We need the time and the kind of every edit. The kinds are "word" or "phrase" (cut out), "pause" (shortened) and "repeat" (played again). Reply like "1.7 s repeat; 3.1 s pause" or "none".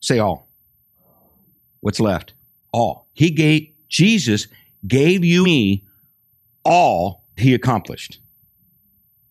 2.6 s pause; 5.4 s word; 7.4 s word

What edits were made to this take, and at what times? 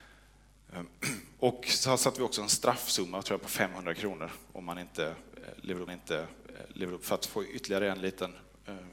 5.9 s repeat

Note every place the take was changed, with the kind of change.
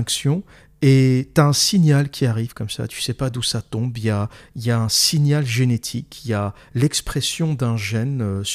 none

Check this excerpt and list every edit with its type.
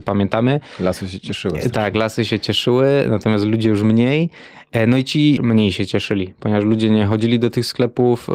5.4 s phrase

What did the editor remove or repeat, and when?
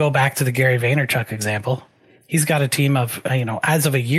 none

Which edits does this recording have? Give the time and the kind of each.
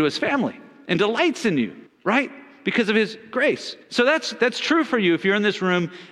1.9 s pause; 3.8 s pause

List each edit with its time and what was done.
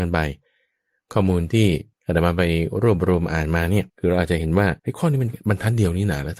1.9 s pause; 3.9 s pause; 4.8 s pause

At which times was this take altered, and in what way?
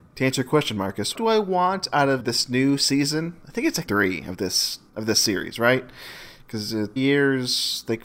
1.1 s word; 2.2 s word; 3.9 s word; 4.9 s word; 7.0 s word

